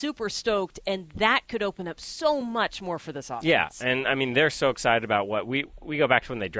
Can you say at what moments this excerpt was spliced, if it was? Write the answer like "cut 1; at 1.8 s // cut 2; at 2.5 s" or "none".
none